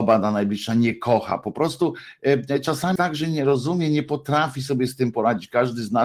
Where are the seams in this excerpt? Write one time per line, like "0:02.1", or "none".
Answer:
0:03.0